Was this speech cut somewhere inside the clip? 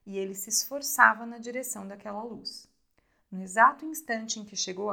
no; 0 cuts

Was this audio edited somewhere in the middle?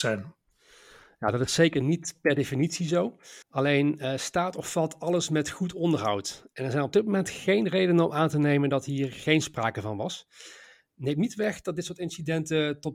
yes; 1 cut; at 3.4 s

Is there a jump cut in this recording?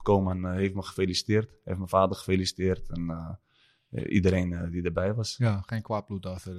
no; 0 cuts

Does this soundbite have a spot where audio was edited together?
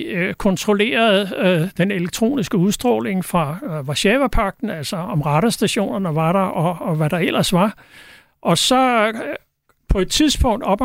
no; 0 cuts

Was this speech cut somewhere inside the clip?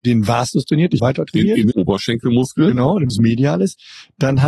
yes; 3 cuts; at 1.0 s, 1.7 s, 3.1 s

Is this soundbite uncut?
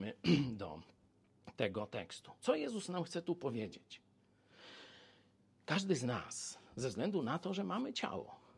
yes; 0 cuts

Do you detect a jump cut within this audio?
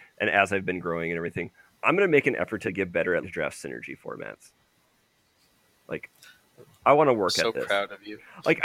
yes; 3 cuts; at 1.7 s, 2.7 s, 3.2 s

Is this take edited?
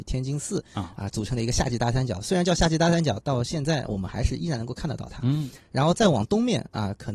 yes; 1 cut; at 3.2 s

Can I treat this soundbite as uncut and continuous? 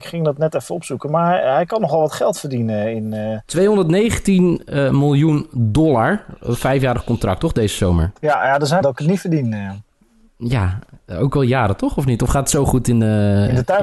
no; 1 cut; at 8.8 s

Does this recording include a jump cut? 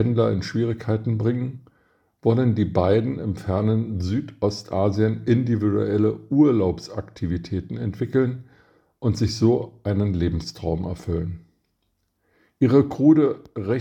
no; 0 cuts

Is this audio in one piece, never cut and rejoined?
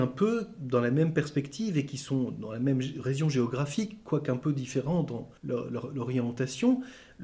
no; 1 cut; at 5.4 s

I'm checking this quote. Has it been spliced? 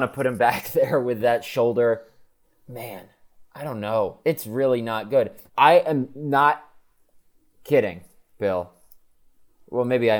yes; 3 cuts; at 2.4 s, 4.2 s, 5.5 s

